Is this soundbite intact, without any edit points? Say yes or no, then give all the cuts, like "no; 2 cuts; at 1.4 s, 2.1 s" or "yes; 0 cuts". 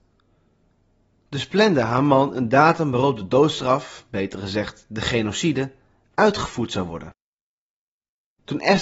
yes; 0 cuts